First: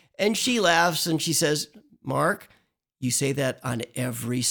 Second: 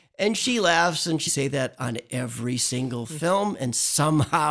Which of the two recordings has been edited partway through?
second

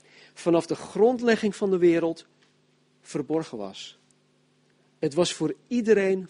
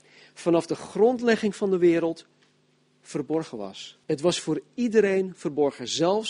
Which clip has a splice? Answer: second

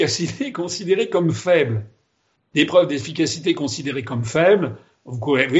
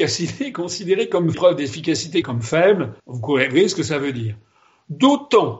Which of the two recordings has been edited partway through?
second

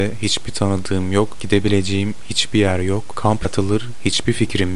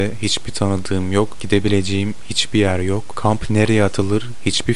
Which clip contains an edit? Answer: first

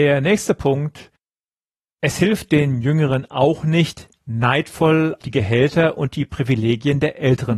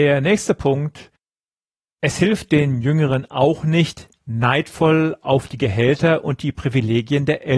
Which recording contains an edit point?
first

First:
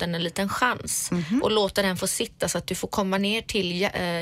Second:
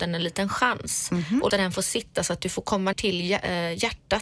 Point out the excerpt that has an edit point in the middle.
second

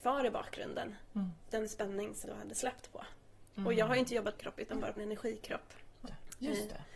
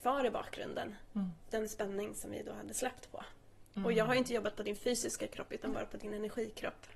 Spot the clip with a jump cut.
first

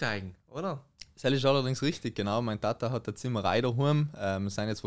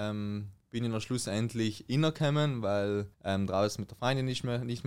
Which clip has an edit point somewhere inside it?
second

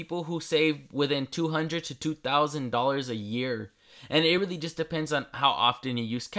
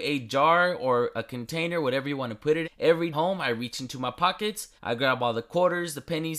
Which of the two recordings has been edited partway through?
second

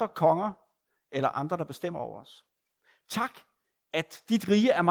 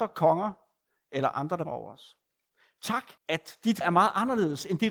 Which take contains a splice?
second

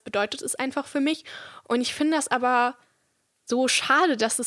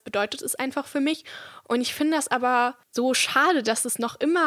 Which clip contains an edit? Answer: second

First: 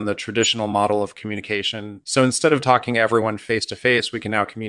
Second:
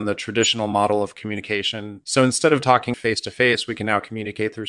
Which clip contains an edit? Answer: second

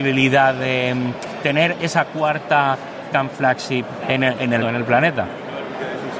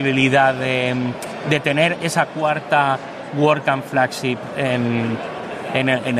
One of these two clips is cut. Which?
first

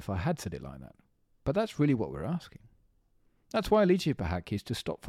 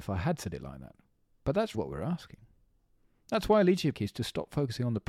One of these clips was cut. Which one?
second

